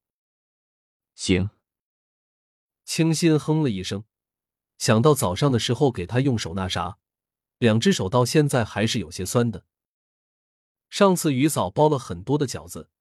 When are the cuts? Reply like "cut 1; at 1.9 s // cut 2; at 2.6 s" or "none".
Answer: none